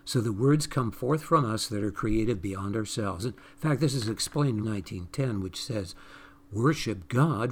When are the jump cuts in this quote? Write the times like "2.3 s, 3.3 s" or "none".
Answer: 4.6 s